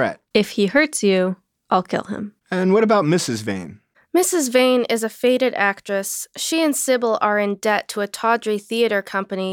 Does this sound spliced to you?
no; 0 cuts

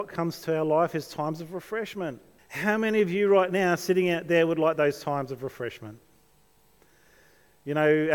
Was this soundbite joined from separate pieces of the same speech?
yes; 1 cut; at 2.4 s

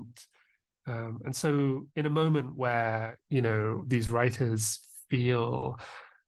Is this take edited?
yes; 2 cuts; at 1.9 s, 3.2 s

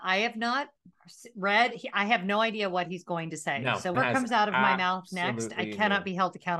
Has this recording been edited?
yes; 1 cut; at 3.9 s

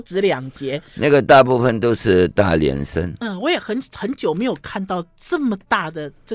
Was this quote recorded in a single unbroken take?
yes; 0 cuts

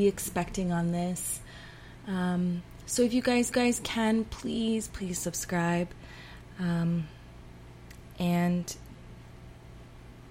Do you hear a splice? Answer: yes; 2 cuts; at 3.5 s, 4.9 s

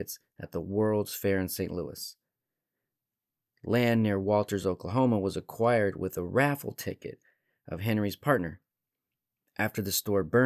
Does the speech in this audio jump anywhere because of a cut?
no; 0 cuts

